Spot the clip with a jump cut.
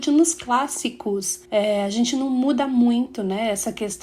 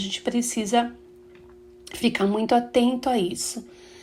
first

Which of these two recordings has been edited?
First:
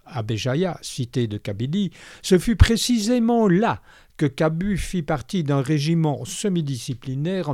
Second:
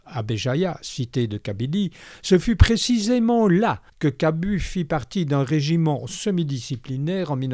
second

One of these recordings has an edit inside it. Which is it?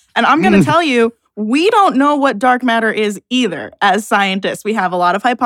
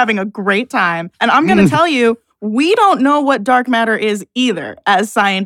second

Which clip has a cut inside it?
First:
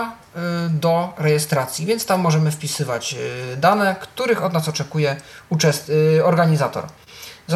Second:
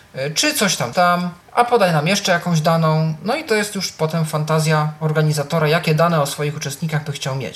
second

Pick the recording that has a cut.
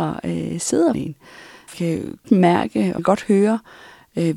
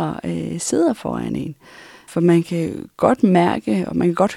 first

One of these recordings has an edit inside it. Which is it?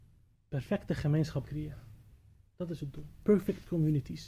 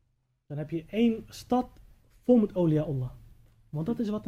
first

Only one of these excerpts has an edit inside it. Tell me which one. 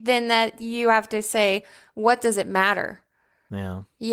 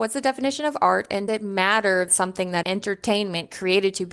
second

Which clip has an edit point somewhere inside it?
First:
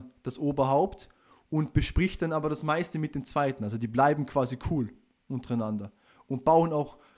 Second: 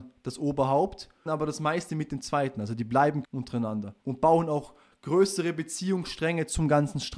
second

